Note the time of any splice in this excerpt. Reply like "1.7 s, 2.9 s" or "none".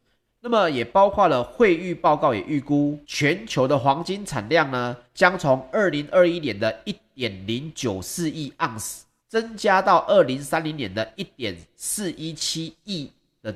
3.0 s, 5.1 s, 9.2 s

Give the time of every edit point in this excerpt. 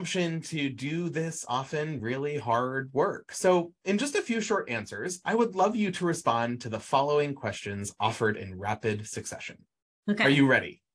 none

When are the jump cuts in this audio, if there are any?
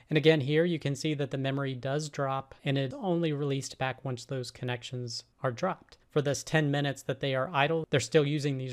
2.6 s, 2.9 s, 6.0 s

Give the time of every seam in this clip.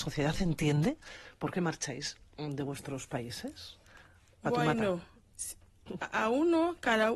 4.4 s

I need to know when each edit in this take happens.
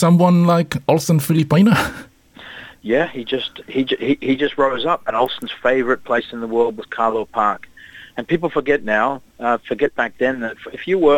none

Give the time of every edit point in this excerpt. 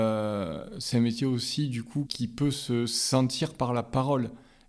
2.1 s

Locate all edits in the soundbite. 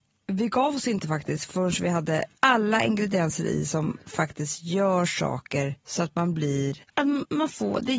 2.3 s, 5.8 s, 6.8 s

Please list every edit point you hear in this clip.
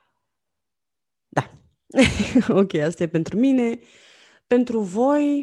none

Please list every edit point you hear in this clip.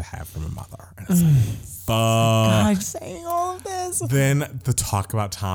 2.8 s

